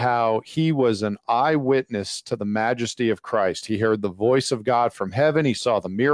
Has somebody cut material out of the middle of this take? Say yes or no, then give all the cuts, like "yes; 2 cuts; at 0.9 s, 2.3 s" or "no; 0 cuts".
no; 0 cuts